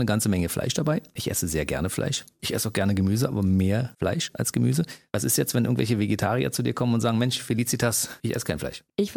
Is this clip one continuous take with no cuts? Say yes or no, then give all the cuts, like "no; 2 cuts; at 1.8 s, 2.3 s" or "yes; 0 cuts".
yes; 0 cuts